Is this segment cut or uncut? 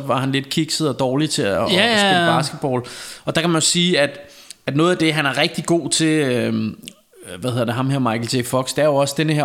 uncut